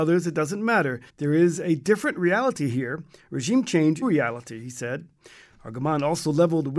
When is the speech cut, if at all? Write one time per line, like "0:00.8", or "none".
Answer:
0:01.1
0:04.0

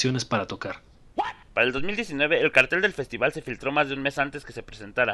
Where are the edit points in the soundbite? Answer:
0:01.4

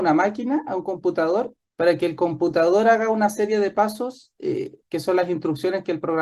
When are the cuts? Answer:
0:01.6
0:04.8

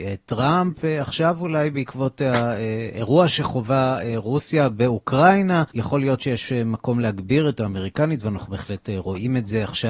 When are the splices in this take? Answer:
0:05.7
0:07.6

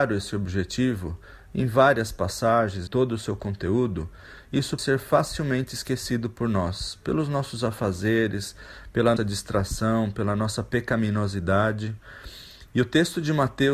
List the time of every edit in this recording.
0:02.9
0:04.8
0:09.2

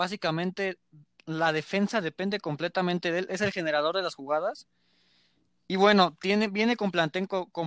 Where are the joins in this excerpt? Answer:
none

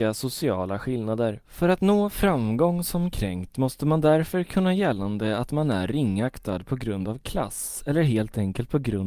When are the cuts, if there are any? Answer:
0:01.4
0:04.8

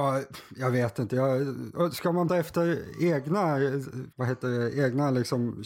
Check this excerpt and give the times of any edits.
0:02.3
0:04.1

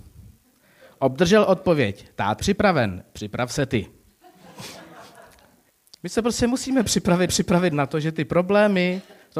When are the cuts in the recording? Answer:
0:02.4
0:05.7
0:07.3

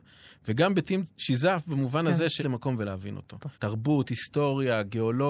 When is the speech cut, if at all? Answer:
0:01.1
0:02.4
0:03.5

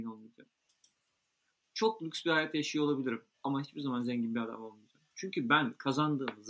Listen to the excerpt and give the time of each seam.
0:03.3

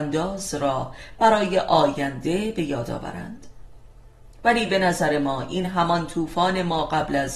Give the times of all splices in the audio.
none

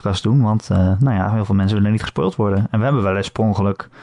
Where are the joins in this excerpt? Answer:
none

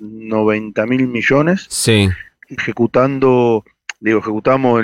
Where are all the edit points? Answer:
0:02.6

